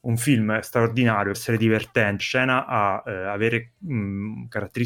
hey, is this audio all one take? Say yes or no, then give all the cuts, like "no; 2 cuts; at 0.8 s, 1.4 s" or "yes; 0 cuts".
no; 2 cuts; at 1.3 s, 2.2 s